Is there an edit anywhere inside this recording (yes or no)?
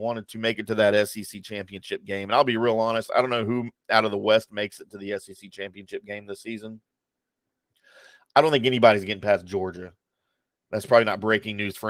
no